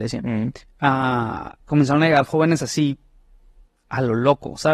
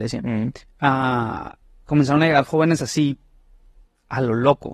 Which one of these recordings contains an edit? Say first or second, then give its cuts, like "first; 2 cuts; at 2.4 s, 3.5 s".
first; 1 cut; at 1.6 s